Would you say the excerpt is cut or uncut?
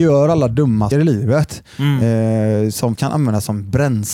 cut